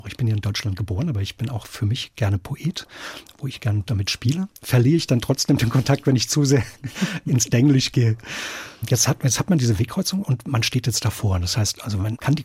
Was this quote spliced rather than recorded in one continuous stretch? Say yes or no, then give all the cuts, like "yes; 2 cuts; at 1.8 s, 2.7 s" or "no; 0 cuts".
yes; 2 cuts; at 4.6 s, 8.8 s